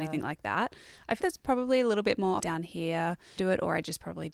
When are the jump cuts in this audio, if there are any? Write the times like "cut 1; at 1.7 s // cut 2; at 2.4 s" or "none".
cut 1; at 1.2 s // cut 2; at 2.4 s // cut 3; at 3.4 s

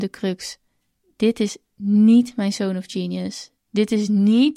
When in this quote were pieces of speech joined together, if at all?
none

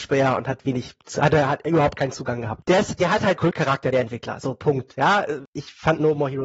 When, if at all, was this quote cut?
cut 1; at 3.4 s // cut 2; at 5.5 s

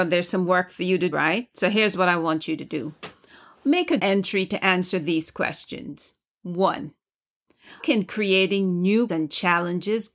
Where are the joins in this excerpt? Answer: cut 1; at 1.1 s // cut 2; at 4.0 s // cut 3; at 7.8 s // cut 4; at 9.1 s

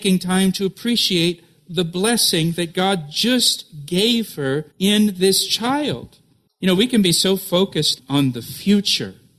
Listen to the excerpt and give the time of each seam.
cut 1; at 4.7 s // cut 2; at 6.5 s

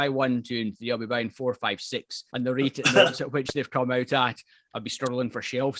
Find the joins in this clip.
cut 1; at 2.3 s

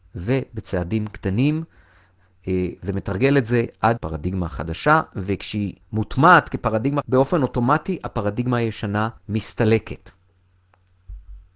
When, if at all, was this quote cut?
cut 1; at 4.0 s // cut 2; at 5.8 s // cut 3; at 7.0 s // cut 4; at 9.2 s

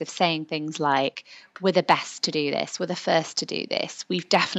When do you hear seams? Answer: none

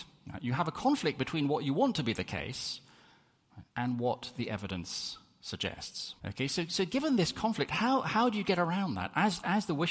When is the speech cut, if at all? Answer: cut 1; at 3.7 s // cut 2; at 6.2 s

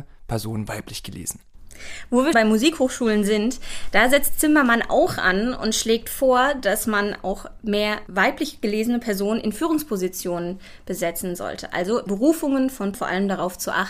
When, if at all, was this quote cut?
cut 1; at 2.3 s // cut 2; at 12.1 s // cut 3; at 12.9 s

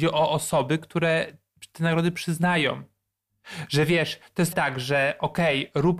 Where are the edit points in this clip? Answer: cut 1; at 4.5 s

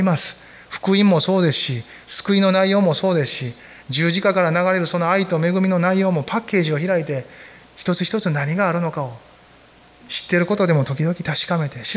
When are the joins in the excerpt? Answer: none

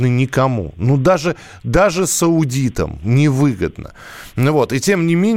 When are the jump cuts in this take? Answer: none

